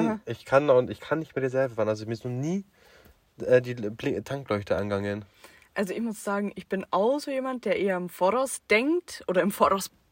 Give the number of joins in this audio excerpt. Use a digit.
0